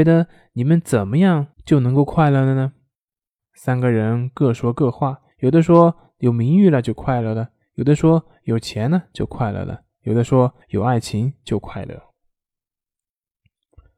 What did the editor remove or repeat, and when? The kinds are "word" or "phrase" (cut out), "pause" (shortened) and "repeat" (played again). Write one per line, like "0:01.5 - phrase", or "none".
0:01.5 - pause
0:05.3 - pause
0:10.6 - pause